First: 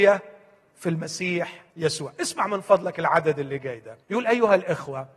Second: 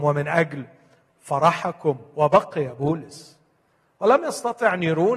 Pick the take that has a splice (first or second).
first